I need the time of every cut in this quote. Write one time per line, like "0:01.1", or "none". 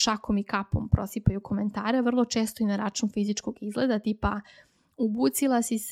none